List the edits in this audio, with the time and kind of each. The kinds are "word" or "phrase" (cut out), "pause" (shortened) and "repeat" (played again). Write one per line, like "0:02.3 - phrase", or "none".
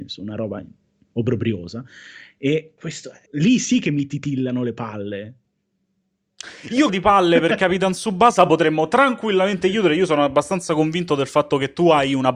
0:02.8 - word
0:03.3 - pause
0:06.9 - phrase

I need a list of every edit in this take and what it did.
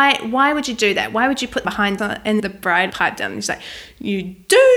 0:01.6 - word
0:02.0 - word
0:02.4 - word
0:02.9 - word

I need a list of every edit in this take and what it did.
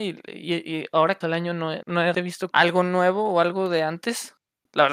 0:01.2 - word
0:01.8 - word
0:02.1 - word
0:02.5 - word

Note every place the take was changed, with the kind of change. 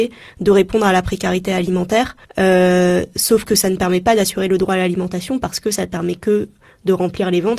0:02.2 - pause

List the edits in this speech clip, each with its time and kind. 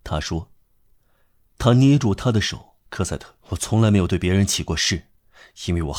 0:02.8 - pause
0:03.4 - pause

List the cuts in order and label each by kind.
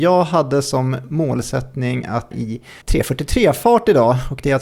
0:02.3 - word
0:02.8 - pause

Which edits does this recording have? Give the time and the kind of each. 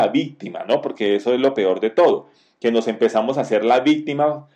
none

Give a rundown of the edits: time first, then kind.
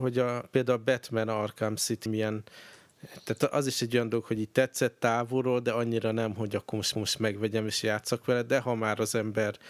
0:02.1 - phrase
0:06.9 - repeat

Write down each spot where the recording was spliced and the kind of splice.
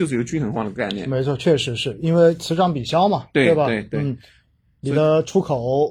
none

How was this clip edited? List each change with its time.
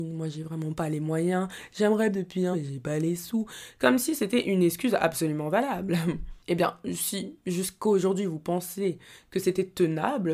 0:02.1 - phrase
0:02.5 - word

